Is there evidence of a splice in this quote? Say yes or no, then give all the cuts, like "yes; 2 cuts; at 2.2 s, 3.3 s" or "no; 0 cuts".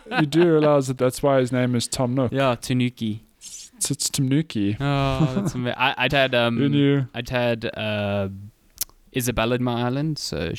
yes; 5 cuts; at 1.0 s, 2.6 s, 6.1 s, 7.2 s, 9.6 s